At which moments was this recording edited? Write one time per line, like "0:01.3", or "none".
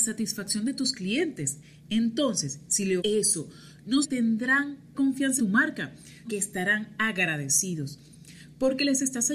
0:03.0
0:04.0
0:04.9
0:05.4
0:06.2